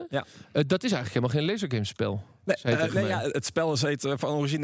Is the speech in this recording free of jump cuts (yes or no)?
yes